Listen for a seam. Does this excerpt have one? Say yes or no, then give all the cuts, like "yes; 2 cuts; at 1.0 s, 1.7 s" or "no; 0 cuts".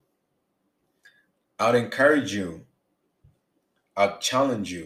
no; 0 cuts